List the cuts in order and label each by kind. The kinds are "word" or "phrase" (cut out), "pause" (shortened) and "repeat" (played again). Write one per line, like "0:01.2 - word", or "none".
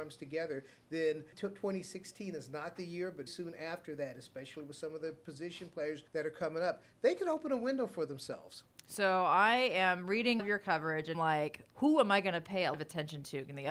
0:01.3 - word
0:03.3 - word
0:06.1 - pause
0:10.4 - word
0:11.1 - phrase
0:11.7 - pause
0:12.7 - word